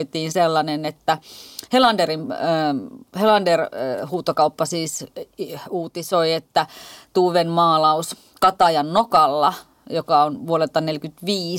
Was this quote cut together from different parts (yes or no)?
no